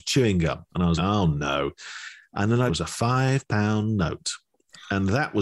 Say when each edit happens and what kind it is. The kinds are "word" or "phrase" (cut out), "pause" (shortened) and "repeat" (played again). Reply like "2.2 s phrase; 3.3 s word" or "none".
1.0 s word; 2.7 s phrase